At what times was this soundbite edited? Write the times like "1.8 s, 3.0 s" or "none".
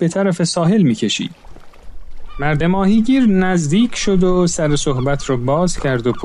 2.6 s

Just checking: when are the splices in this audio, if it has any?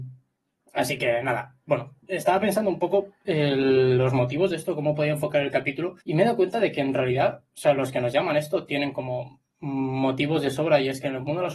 2.0 s, 6.0 s

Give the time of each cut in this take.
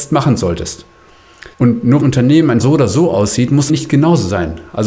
1.5 s, 2.0 s, 2.6 s, 3.7 s

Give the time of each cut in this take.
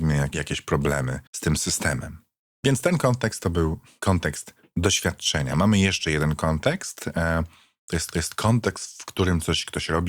1.3 s, 8.1 s

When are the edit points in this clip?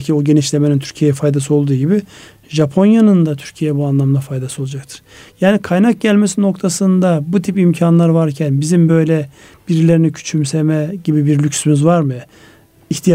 none

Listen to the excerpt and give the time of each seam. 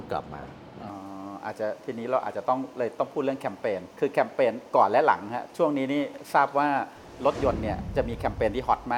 3.9 s

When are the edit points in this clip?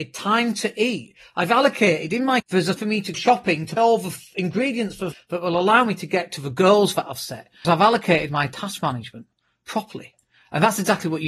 2.4 s, 2.8 s, 3.1 s, 3.8 s, 5.1 s, 7.6 s

